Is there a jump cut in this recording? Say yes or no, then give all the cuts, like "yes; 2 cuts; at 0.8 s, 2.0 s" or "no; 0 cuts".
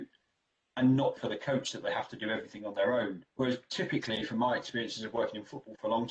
yes; 2 cuts; at 1.2 s, 3.3 s